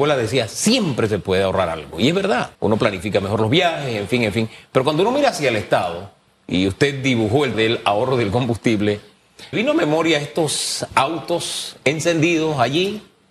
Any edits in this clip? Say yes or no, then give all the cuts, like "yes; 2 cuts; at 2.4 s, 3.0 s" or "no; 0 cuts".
yes; 4 cuts; at 2.5 s, 6.3 s, 7.5 s, 9.5 s